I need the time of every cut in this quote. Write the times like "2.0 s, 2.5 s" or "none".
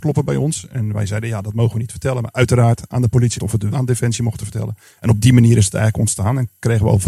3.3 s, 3.7 s